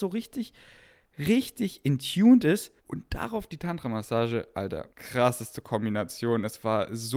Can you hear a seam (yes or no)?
yes